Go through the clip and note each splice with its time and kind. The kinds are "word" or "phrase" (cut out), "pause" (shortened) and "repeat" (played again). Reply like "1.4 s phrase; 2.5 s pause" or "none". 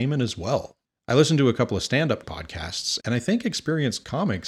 2.2 s word; 3.0 s word